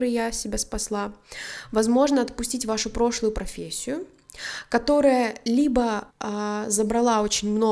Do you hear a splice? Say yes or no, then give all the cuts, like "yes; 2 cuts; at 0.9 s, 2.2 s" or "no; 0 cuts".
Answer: yes; 1 cut; at 6.1 s